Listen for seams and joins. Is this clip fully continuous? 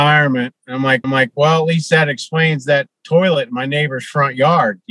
no; 1 cut; at 1.0 s

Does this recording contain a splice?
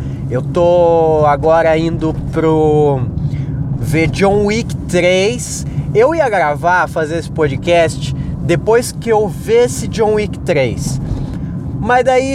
no; 0 cuts

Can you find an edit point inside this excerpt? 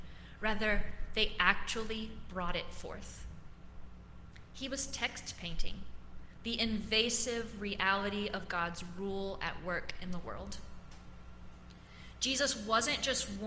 no; 0 cuts

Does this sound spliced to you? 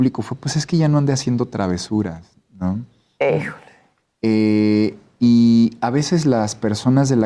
no; 0 cuts

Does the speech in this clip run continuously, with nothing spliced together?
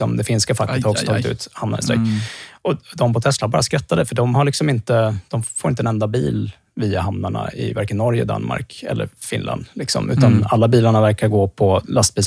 yes; 0 cuts

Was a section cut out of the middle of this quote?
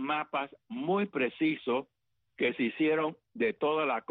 no; 0 cuts

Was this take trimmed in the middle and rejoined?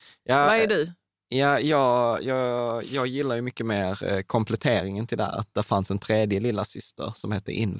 no; 0 cuts

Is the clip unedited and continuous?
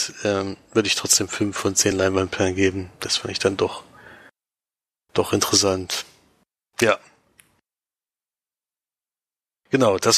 yes; 0 cuts

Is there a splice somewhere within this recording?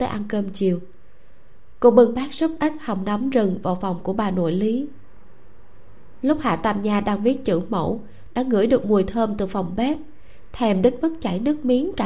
no; 0 cuts

